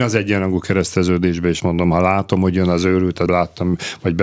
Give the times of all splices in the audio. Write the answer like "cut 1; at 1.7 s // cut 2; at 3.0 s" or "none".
cut 1; at 1.6 s // cut 2; at 3.3 s